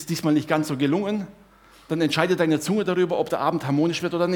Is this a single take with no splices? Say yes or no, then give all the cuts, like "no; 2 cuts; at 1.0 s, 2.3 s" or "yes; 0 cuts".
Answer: yes; 0 cuts